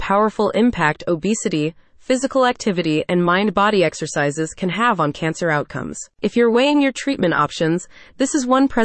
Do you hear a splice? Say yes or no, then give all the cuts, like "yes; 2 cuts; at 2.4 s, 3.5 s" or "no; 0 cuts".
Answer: no; 0 cuts